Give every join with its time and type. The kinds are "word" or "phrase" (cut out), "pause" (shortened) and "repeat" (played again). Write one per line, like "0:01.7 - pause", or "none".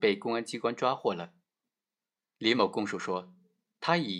none